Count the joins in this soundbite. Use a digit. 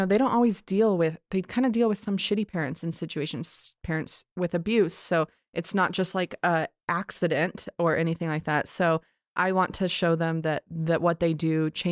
0